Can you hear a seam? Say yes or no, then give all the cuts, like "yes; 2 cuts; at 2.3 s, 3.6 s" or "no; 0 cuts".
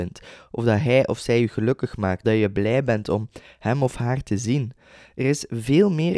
yes; 1 cut; at 2.2 s